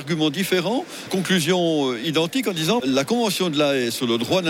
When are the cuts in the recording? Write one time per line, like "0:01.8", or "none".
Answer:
0:01.1
0:02.8